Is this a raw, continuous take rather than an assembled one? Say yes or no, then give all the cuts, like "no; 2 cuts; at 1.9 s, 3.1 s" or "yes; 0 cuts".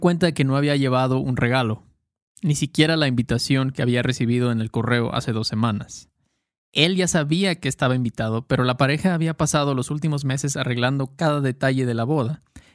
yes; 0 cuts